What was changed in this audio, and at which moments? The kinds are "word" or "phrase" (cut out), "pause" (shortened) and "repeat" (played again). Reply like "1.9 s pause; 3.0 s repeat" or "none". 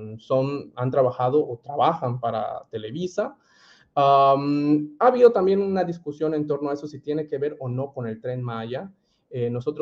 none